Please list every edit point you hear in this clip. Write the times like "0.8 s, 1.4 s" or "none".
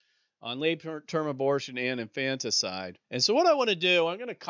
3.0 s